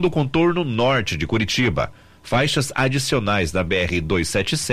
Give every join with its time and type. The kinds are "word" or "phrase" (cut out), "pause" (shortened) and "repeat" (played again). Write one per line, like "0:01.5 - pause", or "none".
none